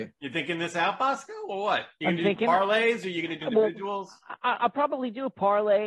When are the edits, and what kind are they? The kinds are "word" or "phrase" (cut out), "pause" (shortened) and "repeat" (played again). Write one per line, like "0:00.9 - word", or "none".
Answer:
0:03.4 - word